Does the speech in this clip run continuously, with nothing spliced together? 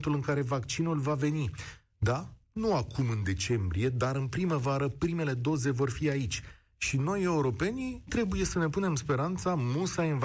no; 1 cut; at 8.1 s

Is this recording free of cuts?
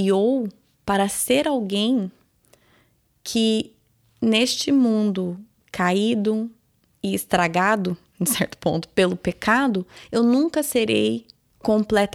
yes; 0 cuts

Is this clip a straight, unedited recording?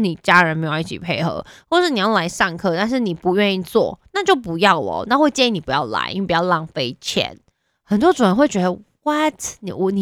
yes; 0 cuts

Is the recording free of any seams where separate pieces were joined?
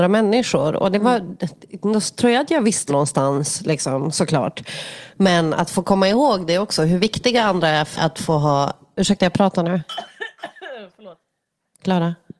no; 2 cuts; at 2.9 s, 7.9 s

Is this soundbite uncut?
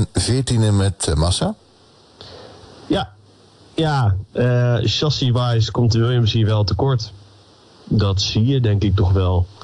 yes; 0 cuts

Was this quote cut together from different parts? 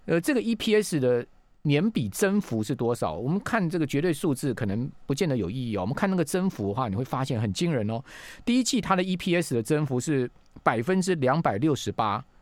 no; 0 cuts

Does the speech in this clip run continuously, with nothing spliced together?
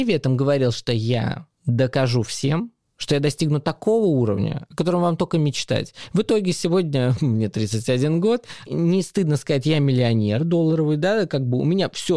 yes; 0 cuts

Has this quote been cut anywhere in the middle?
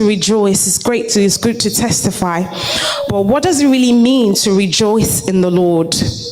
no; 0 cuts

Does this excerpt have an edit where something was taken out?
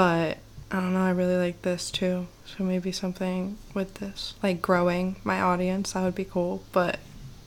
yes; 2 cuts; at 2.3 s, 4.4 s

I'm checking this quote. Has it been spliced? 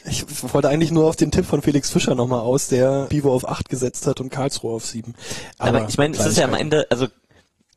yes; 1 cut; at 3.1 s

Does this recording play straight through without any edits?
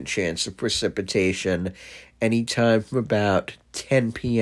yes; 0 cuts

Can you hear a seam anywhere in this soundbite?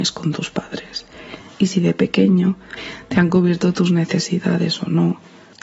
no; 0 cuts

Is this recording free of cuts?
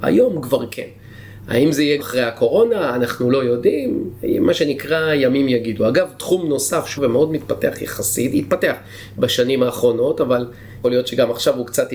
no; 3 cuts; at 2.0 s, 7.0 s, 10.8 s

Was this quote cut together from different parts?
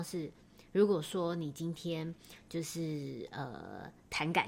no; 0 cuts

